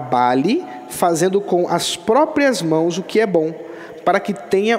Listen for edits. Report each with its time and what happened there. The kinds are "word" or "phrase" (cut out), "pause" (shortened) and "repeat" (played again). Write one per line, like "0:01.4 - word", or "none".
none